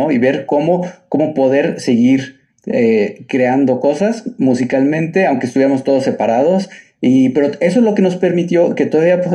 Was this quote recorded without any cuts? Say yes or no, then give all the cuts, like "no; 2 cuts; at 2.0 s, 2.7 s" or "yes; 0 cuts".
yes; 0 cuts